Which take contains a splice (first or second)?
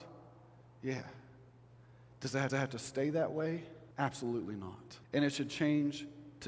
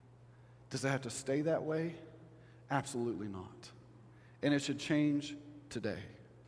first